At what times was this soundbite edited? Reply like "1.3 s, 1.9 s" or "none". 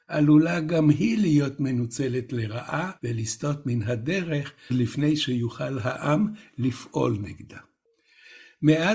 3.0 s, 4.7 s